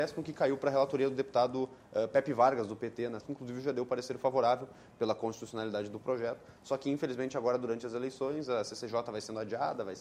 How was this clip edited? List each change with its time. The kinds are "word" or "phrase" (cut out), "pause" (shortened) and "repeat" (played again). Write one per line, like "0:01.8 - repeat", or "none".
0:03.2 - word